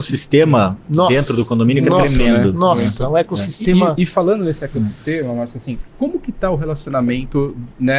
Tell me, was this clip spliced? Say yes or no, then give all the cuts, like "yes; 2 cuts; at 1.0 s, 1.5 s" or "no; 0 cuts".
no; 0 cuts